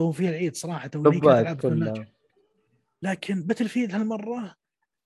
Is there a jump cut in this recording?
no; 0 cuts

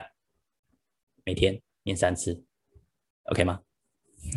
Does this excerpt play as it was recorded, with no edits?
yes; 0 cuts

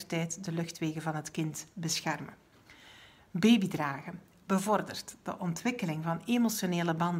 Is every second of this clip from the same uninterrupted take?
yes; 0 cuts

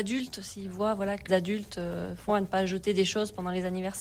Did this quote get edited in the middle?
yes; 2 cuts; at 1.3 s, 2.3 s

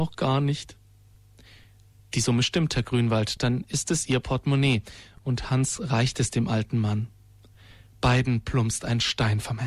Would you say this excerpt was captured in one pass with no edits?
yes; 0 cuts

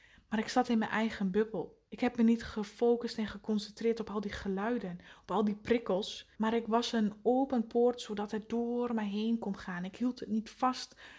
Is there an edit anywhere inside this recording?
yes; 2 cuts; at 1.9 s, 6.3 s

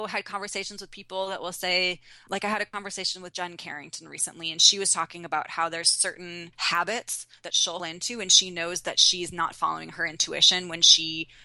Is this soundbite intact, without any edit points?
no; 3 cuts; at 2.3 s, 6.5 s, 7.8 s

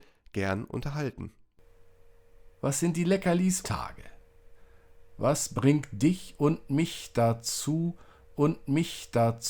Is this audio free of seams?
no; 3 cuts; at 2.5 s, 3.6 s, 8.3 s

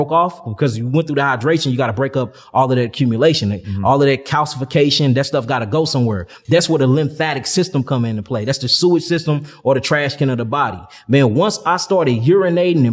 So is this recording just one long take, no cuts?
yes; 0 cuts

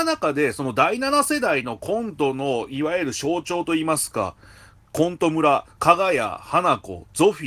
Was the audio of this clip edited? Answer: no; 0 cuts

